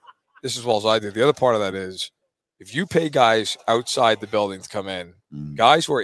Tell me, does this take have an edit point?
no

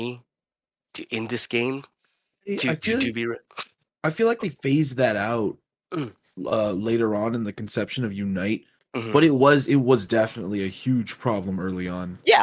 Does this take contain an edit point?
no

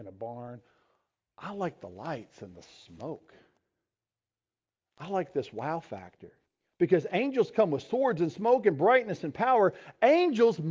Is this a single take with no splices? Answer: no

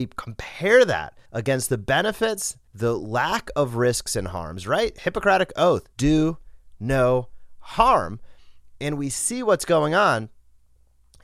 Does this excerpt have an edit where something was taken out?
yes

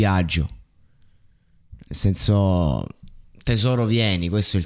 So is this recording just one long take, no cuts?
yes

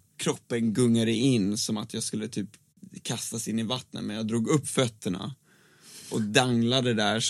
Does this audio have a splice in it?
no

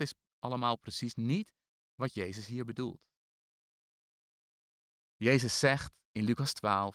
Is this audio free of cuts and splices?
yes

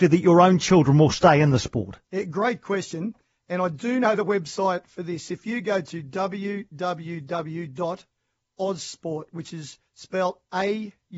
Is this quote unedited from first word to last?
no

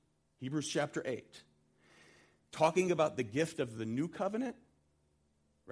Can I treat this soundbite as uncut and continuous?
yes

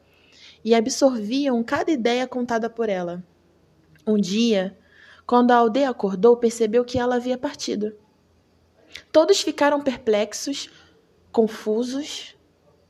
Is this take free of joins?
yes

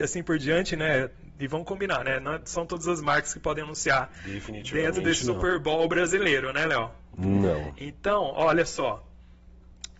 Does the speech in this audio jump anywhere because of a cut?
no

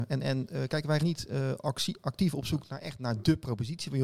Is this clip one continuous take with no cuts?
no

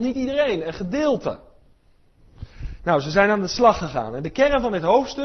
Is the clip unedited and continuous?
yes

